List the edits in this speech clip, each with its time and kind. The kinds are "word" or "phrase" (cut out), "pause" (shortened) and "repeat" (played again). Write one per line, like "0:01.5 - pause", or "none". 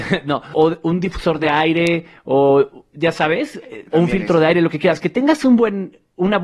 none